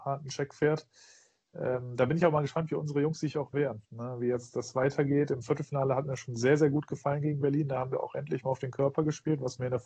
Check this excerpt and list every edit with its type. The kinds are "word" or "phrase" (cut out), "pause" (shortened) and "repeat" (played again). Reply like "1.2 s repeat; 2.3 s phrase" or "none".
3.8 s pause